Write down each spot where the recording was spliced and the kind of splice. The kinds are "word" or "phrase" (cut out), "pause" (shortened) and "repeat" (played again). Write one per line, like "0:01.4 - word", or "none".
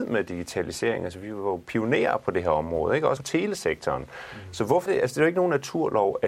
0:03.2 - word
0:04.9 - word